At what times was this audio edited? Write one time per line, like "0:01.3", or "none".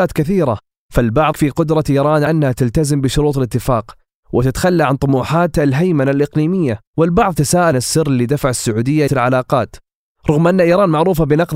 0:01.3
0:02.3
0:06.9
0:07.7
0:09.1

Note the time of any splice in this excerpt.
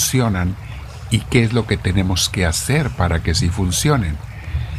none

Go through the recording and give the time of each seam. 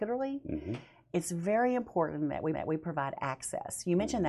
0:02.5

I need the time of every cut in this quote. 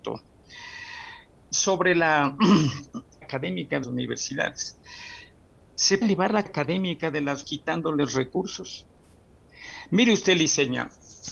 0:01.3
0:03.2
0:03.8
0:06.0
0:06.5
0:07.4

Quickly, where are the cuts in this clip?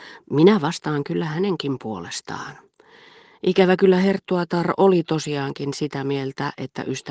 none

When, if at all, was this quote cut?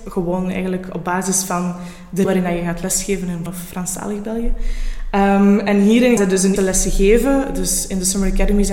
0:02.2
0:03.5
0:06.2
0:06.6

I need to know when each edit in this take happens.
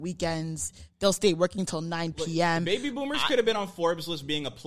none

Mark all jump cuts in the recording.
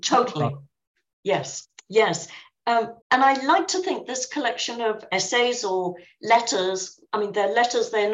0:03.0

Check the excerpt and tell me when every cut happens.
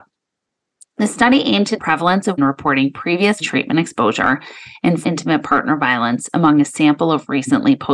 0:01.8
0:02.4
0:03.4
0:05.0

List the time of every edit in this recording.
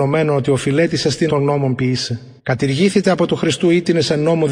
0:01.3
0:02.4

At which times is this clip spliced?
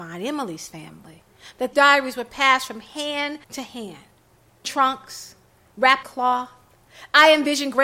0:01.7
0:03.4
0:04.6
0:06.0

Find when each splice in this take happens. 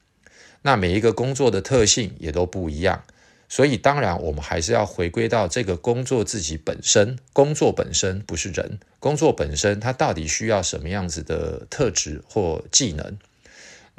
0:08.9

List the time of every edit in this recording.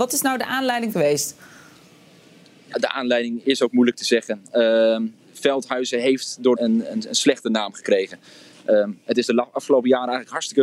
0:00.9
0:02.7
0:03.4
0:05.2
0:06.6

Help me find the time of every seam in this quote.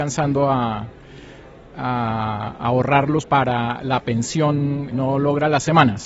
0:03.2
0:04.9

